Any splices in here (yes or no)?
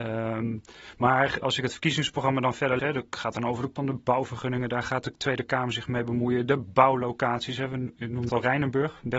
yes